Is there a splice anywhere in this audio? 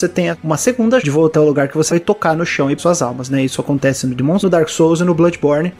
yes; 5 cuts; at 1.0 s, 1.3 s, 1.9 s, 2.8 s, 4.4 s

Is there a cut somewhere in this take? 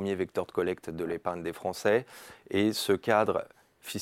no; 0 cuts

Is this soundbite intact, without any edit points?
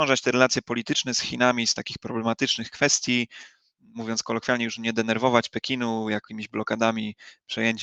yes; 0 cuts

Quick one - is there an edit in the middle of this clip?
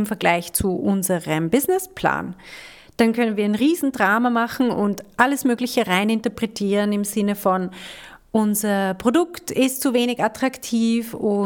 no; 0 cuts

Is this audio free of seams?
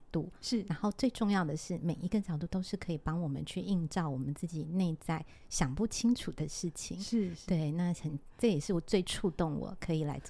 yes; 0 cuts

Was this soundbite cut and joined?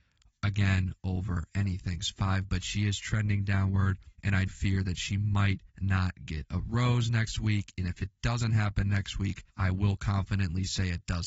yes; 5 cuts; at 2.1 s, 4.1 s, 4.5 s, 5.7 s, 9.5 s

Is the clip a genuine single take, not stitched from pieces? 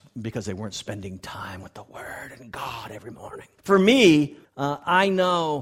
no; 2 cuts; at 3.6 s, 4.4 s

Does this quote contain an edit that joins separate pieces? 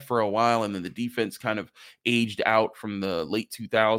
no; 0 cuts

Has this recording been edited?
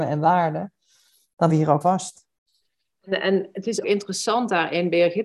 yes; 3 cuts; at 1.5 s, 1.8 s, 3.8 s

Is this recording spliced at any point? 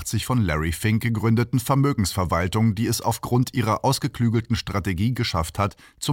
no; 0 cuts

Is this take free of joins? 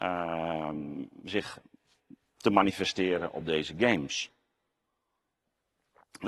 yes; 0 cuts

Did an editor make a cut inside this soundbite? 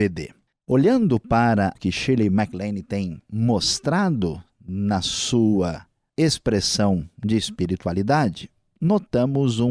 yes; 1 cut; at 1.8 s

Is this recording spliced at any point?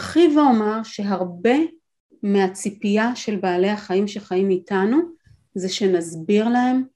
no; 0 cuts

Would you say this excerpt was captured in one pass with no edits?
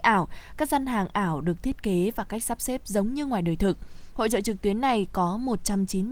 yes; 0 cuts

